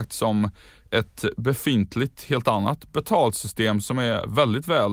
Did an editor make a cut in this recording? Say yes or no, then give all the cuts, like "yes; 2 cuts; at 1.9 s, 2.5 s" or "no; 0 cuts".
no; 0 cuts